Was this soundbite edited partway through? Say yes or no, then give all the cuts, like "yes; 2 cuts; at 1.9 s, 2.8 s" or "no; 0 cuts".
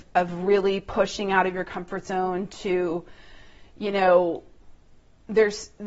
no; 0 cuts